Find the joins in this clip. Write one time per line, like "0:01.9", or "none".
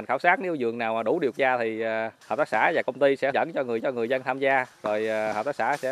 0:01.3
0:02.2
0:03.3
0:03.8